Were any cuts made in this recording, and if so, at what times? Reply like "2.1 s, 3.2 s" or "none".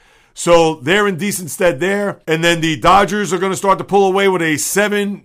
2.2 s